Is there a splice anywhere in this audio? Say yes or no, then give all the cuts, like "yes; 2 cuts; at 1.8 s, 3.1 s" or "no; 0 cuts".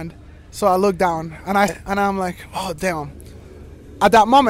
yes; 1 cut; at 1.7 s